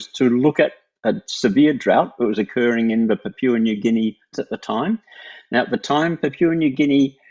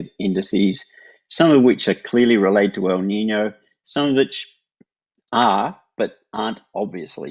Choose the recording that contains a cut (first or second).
first